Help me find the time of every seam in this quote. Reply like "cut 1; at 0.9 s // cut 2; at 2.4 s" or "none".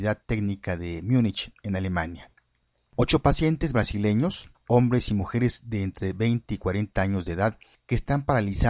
none